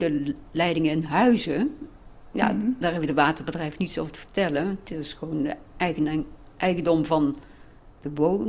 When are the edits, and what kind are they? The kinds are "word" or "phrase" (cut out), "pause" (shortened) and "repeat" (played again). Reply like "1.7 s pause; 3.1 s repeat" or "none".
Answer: none